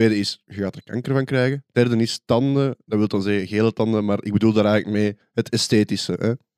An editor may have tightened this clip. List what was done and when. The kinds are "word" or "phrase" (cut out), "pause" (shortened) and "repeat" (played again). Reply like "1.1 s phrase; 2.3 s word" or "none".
5.2 s pause